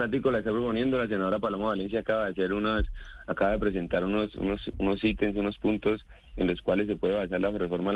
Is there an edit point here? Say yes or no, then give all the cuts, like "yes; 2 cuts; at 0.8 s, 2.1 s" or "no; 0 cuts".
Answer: no; 0 cuts